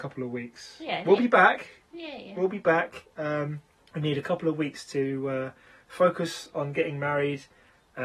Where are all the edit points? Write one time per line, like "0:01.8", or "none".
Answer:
0:03.7